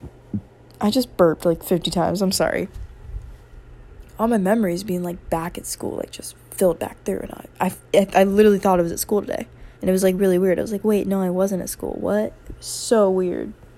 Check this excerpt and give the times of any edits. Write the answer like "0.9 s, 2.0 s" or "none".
9.8 s